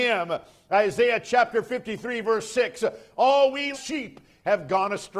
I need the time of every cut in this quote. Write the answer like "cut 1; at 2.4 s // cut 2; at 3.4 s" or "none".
cut 1; at 3.7 s